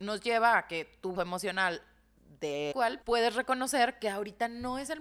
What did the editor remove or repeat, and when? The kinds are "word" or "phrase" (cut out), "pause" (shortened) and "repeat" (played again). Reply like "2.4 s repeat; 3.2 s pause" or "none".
1.2 s phrase; 2.7 s phrase; 3.0 s word